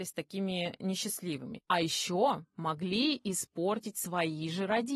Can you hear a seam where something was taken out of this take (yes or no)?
no